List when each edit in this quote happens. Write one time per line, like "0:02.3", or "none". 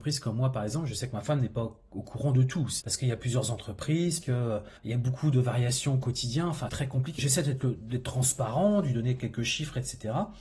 0:02.8
0:04.2
0:04.8
0:06.7
0:07.2

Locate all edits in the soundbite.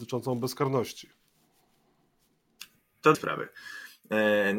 0:03.1

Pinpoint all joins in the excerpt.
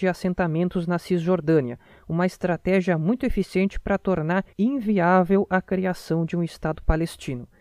0:04.5

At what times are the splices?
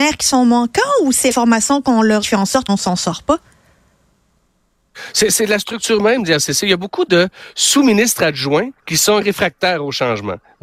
0:01.3
0:02.2
0:02.7
0:08.8
0:09.2

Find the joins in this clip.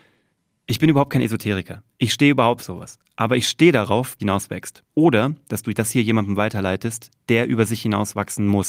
0:02.6
0:04.2
0:04.9

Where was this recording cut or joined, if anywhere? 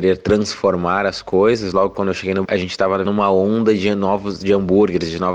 0:02.4
0:03.1

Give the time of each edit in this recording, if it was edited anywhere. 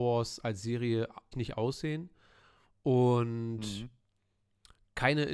0:01.3

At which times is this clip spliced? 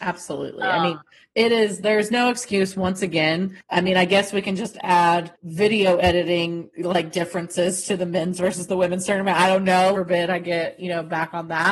0:09.9

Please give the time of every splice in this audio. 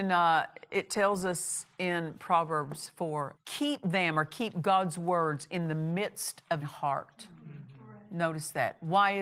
0:03.4
0:06.6

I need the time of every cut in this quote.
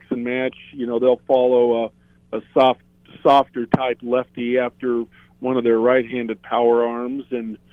none

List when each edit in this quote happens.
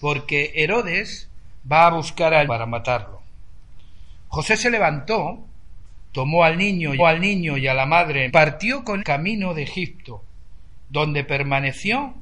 0:02.5
0:07.0
0:08.3
0:09.0

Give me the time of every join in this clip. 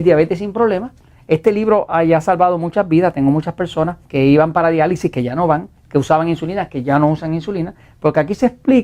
0:04.0
0:05.8

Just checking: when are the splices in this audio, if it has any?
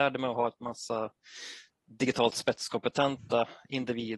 none

